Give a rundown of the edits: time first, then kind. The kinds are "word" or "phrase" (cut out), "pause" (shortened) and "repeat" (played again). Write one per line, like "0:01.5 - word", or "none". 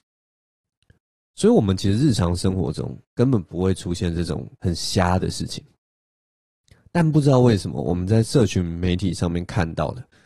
0:03.0 - pause
0:04.6 - pause